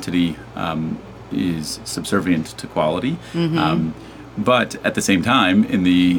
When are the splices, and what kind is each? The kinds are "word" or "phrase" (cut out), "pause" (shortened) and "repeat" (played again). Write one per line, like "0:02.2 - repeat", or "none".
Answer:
none

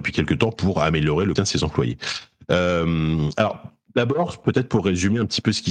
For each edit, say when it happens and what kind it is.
0:01.4 - word

